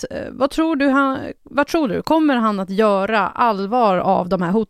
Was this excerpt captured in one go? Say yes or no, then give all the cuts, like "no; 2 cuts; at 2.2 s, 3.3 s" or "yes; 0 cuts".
yes; 0 cuts